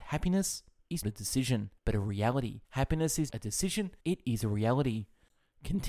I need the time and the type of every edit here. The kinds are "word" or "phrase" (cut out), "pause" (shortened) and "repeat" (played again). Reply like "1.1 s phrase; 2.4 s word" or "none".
1.0 s word; 1.8 s pause; 2.6 s pause; 3.3 s word; 4.0 s pause